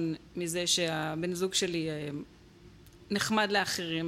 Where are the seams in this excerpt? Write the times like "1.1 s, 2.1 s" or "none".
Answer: none